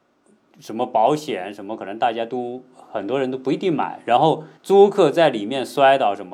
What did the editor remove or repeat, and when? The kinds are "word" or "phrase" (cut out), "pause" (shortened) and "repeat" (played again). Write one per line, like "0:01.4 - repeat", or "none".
0:04.6 - pause